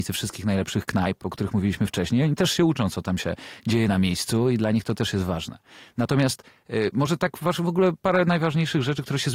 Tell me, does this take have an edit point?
no; 0 cuts

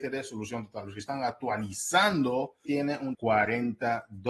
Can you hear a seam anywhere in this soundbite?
yes; 2 cuts; at 2.7 s, 3.1 s

